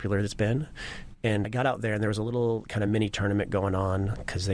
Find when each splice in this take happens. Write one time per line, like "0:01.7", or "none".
none